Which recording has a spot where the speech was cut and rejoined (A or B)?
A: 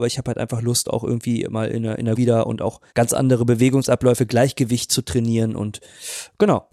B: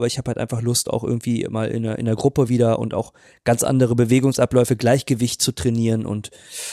A